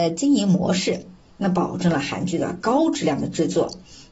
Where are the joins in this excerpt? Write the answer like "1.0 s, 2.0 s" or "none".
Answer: none